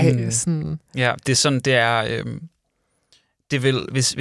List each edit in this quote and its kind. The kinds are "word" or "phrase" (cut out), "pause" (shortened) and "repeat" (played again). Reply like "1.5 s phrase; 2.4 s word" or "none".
none